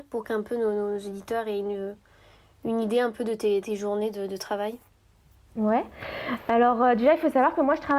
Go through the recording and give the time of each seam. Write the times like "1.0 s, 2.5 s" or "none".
none

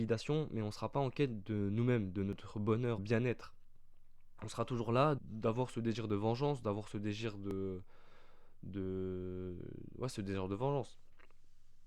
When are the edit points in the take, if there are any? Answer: 3.0 s, 5.2 s

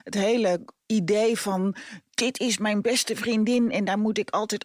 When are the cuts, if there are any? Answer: none

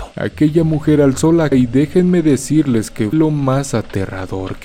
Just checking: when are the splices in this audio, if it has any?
1.5 s, 3.1 s

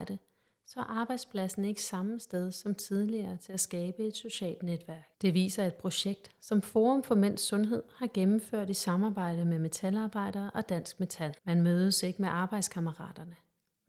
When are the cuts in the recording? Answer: 5.1 s, 11.4 s

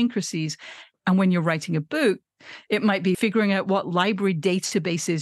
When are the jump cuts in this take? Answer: 3.1 s

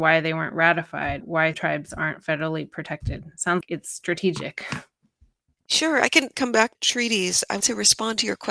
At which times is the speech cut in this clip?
1.2 s, 1.5 s, 3.6 s, 6.3 s, 6.7 s, 7.6 s

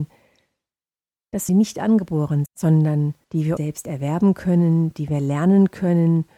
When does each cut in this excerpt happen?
1.5 s, 2.5 s, 3.2 s, 3.6 s

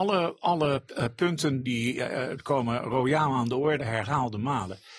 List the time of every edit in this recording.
1.6 s, 3.8 s

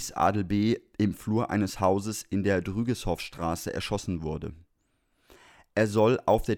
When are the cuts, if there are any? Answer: none

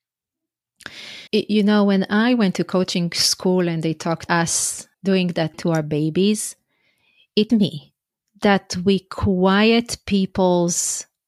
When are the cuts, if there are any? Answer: 1.3 s, 4.3 s, 4.9 s, 5.5 s, 7.5 s

